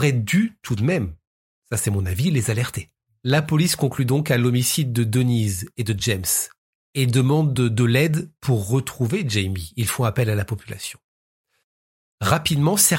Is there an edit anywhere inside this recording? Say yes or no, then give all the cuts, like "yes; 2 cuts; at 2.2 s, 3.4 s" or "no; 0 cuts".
no; 0 cuts